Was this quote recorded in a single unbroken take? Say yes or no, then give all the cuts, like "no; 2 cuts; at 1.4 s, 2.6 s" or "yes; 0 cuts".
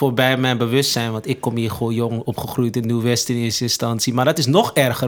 yes; 0 cuts